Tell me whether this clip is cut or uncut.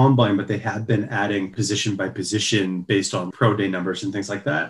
cut